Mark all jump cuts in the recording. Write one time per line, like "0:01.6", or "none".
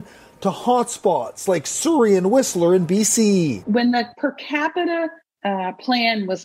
0:05.2